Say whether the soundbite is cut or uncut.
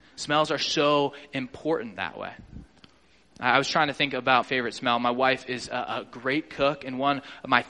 cut